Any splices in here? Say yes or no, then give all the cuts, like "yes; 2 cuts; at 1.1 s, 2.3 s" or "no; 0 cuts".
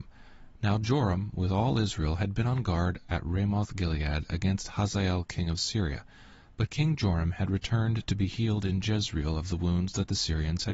no; 0 cuts